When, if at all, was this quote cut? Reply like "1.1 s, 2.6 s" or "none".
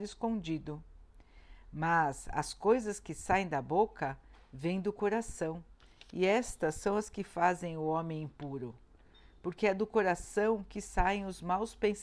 none